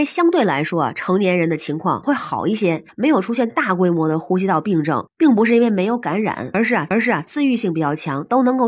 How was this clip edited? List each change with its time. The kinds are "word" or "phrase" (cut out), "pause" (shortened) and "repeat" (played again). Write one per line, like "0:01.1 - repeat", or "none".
0:06.9 - repeat